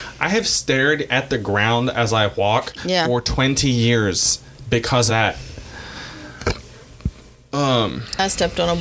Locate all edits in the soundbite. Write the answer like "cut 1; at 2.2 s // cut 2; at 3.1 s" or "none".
cut 1; at 5.1 s